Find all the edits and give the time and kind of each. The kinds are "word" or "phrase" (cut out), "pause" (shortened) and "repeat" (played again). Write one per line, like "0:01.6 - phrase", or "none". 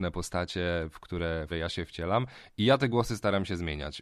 0:01.5 - word